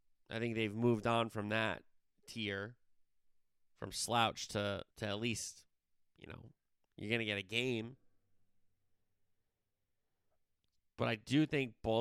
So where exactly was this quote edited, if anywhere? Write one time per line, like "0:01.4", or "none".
0:04.9
0:06.7